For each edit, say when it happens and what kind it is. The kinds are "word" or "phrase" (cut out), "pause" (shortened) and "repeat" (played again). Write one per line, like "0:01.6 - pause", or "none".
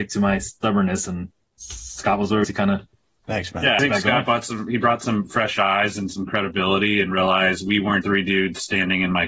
0:01.6 - word
0:02.4 - word
0:03.8 - word
0:08.0 - word